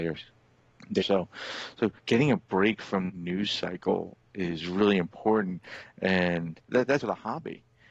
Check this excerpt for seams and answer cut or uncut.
cut